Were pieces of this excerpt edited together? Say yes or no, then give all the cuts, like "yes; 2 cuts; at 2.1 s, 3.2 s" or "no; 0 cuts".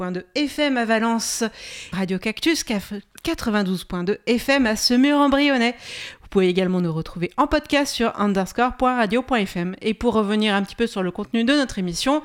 yes; 1 cut; at 1.9 s